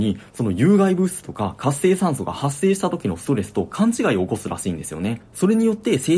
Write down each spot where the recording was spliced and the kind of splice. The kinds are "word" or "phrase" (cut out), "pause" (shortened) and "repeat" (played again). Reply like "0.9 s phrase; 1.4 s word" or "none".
none

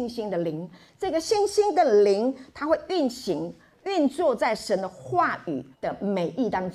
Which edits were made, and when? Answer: 5.7 s pause

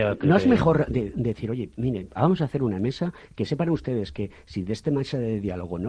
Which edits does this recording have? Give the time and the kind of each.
none

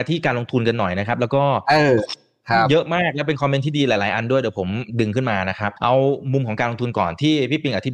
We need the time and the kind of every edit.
5.8 s pause

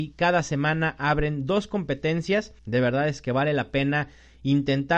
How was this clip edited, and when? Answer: 2.6 s pause

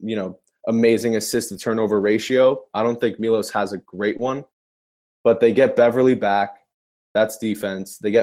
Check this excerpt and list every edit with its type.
none

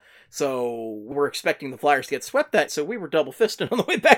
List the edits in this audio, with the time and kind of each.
1.1 s word; 2.7 s word

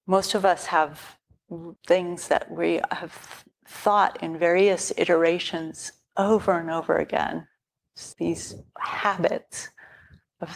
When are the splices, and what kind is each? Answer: 1.8 s pause; 3.5 s pause; 8.1 s word

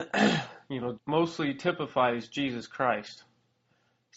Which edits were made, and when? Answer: 1.0 s word

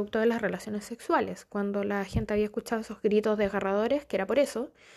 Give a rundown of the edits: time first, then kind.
none

